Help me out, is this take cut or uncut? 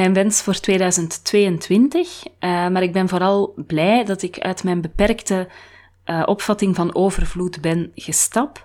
uncut